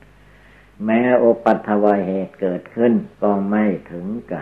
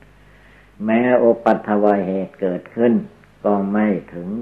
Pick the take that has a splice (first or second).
first